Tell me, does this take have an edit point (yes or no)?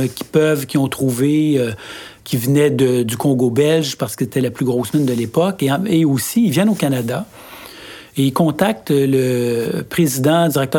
yes